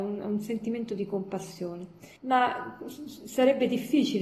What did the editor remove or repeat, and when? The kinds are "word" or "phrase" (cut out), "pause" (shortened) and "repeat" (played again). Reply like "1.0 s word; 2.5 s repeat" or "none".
2.2 s pause